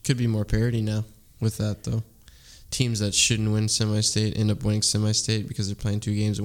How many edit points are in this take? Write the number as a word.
zero